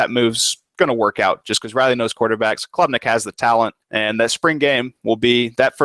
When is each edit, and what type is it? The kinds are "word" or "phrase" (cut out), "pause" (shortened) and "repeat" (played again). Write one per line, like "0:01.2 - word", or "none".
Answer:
none